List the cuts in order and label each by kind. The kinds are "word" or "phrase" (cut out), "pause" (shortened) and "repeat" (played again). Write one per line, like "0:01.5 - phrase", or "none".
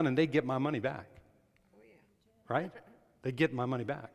none